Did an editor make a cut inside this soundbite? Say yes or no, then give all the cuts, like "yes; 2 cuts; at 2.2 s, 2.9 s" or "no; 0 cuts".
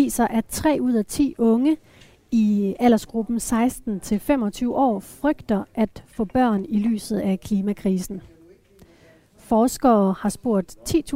no; 0 cuts